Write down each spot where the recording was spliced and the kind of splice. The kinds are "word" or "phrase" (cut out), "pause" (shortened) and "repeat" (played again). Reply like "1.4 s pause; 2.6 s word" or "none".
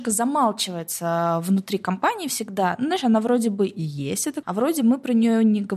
4.4 s word